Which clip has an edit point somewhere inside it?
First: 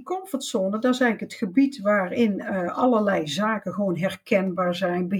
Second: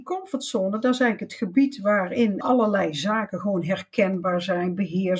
second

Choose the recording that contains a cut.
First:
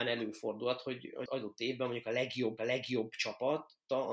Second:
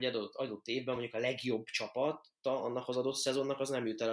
first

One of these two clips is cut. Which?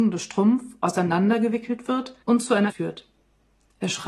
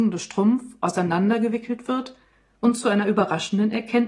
first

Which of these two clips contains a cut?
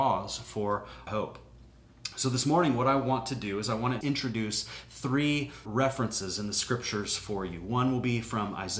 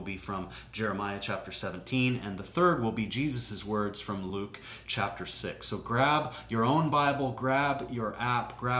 first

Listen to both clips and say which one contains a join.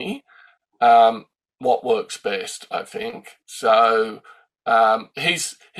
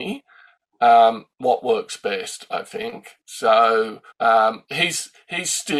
second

